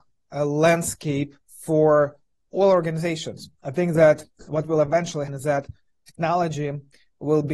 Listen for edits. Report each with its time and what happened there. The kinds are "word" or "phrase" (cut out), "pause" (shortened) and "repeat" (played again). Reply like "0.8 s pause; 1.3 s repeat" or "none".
1.4 s pause; 5.3 s word